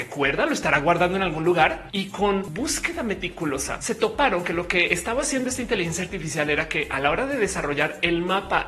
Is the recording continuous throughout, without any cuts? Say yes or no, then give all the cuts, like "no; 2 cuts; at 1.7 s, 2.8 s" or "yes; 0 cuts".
yes; 0 cuts